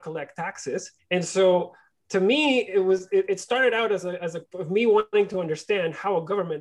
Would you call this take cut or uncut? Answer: cut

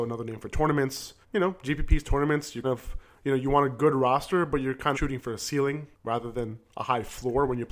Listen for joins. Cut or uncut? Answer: cut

